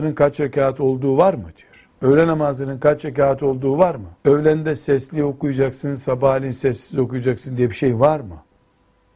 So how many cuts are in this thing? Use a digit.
2